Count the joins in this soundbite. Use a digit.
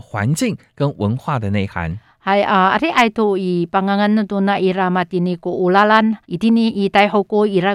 1